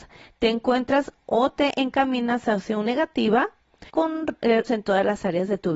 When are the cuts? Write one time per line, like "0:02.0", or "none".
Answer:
0:02.9
0:03.9
0:04.7